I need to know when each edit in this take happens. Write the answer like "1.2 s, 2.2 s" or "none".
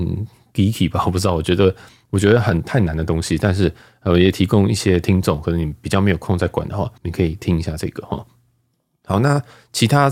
7.0 s

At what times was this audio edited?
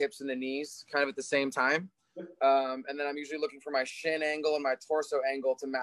none

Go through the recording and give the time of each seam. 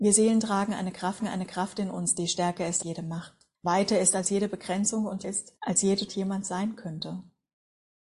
1.2 s, 2.8 s, 3.6 s, 5.2 s, 5.6 s, 6.1 s

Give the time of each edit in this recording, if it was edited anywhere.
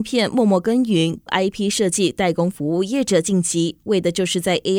1.3 s

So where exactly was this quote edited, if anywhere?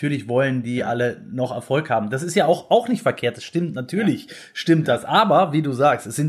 none

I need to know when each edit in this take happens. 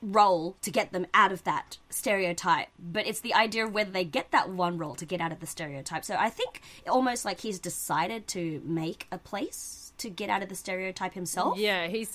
1.8 s

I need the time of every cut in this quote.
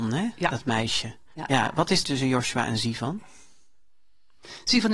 2.0 s

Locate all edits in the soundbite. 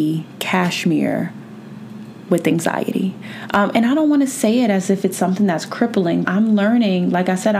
6.2 s

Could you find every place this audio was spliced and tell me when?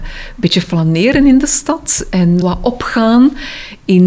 2.4 s

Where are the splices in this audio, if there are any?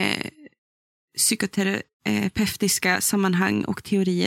none

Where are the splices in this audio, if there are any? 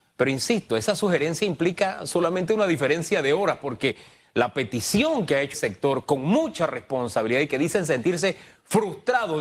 5.5 s

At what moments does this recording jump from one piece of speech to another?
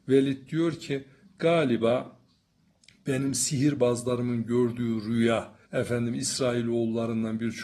5.6 s

